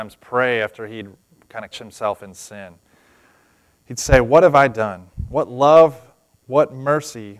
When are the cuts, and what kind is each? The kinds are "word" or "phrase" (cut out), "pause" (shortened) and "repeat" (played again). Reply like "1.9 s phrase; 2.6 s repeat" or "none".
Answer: 1.7 s word